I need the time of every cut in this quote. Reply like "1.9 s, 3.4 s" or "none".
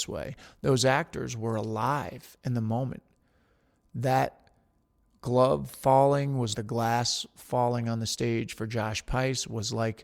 6.5 s